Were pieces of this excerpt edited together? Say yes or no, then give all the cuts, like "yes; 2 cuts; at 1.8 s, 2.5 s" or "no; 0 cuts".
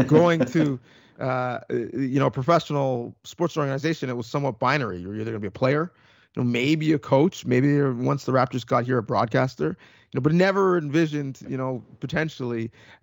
no; 0 cuts